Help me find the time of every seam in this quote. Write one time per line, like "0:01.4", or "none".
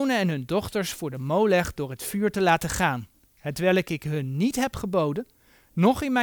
none